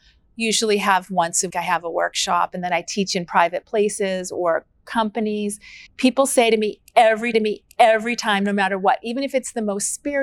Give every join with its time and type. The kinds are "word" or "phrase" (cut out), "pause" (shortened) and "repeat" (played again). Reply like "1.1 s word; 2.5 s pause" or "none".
1.5 s word; 5.9 s pause; 7.3 s repeat